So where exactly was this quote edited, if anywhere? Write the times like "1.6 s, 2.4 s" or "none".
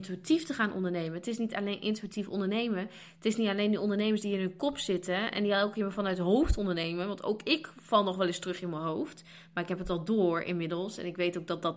none